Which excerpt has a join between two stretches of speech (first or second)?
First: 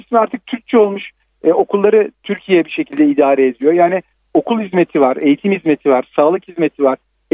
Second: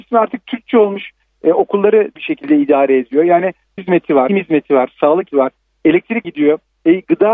second